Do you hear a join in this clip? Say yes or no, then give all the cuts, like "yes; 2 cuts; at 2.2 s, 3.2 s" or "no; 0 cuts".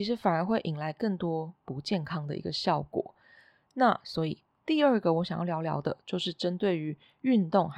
no; 0 cuts